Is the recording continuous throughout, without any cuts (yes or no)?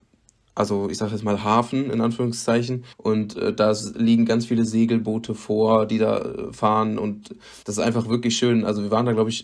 no